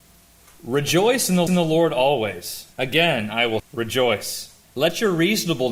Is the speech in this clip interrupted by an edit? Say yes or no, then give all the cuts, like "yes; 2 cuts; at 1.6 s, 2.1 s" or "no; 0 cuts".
yes; 4 cuts; at 1.5 s, 2.7 s, 3.6 s, 4.6 s